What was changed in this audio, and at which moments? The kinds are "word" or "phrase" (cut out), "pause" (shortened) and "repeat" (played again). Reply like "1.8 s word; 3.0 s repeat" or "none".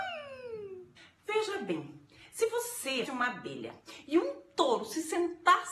3.1 s word